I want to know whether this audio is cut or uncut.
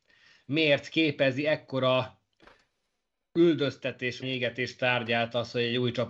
cut